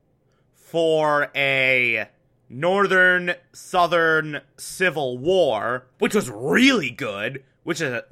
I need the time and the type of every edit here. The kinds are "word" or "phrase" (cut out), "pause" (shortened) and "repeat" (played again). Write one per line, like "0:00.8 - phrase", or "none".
0:02.3 - pause
0:05.9 - pause